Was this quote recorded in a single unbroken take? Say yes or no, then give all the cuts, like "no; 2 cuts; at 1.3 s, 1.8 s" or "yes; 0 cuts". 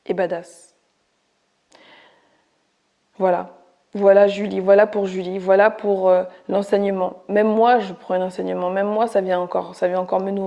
yes; 0 cuts